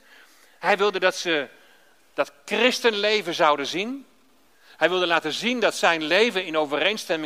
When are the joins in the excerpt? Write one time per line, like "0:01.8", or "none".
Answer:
none